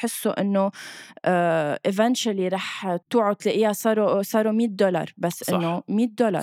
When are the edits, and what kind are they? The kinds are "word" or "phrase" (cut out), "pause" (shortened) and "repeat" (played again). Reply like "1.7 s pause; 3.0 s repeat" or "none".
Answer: 3.0 s pause